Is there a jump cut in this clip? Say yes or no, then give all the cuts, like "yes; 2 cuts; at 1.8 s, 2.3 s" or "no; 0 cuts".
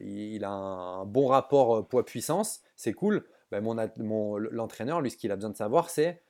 no; 0 cuts